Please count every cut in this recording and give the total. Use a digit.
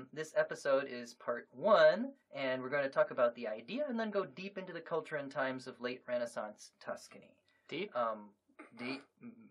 1